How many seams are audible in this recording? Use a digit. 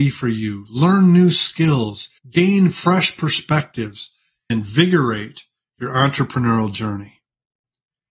2